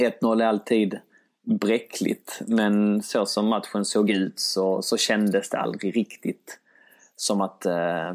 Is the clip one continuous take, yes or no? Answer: yes